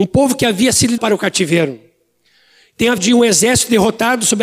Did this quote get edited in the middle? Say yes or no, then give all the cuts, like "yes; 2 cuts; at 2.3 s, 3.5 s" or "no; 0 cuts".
yes; 2 cuts; at 1.0 s, 3.0 s